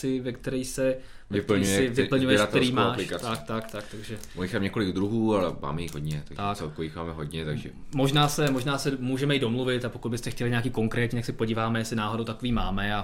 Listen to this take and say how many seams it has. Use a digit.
0